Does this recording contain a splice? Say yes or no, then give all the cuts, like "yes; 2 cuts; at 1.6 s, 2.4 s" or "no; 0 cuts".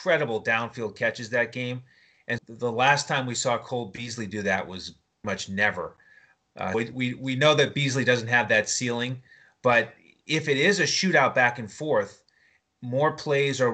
yes; 3 cuts; at 2.4 s, 5.2 s, 6.7 s